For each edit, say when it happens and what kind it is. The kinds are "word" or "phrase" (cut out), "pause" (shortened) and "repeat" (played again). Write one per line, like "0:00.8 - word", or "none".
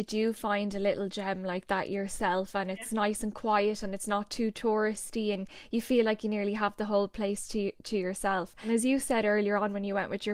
none